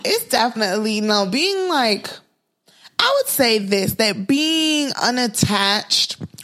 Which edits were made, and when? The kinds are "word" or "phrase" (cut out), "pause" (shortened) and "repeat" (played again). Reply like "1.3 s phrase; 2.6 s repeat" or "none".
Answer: none